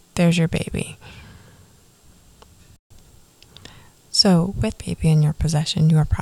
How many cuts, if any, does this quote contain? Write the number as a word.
one